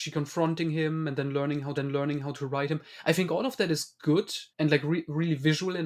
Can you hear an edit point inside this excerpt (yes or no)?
yes